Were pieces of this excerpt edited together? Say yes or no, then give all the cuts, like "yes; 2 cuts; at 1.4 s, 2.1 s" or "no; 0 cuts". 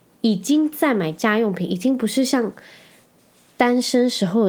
no; 0 cuts